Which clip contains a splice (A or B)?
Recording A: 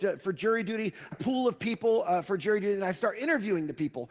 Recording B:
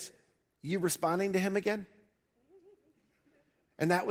A